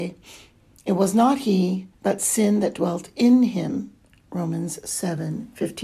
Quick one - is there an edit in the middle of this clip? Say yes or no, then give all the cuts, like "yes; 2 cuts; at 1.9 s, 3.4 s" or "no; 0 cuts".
yes; 1 cut; at 1.9 s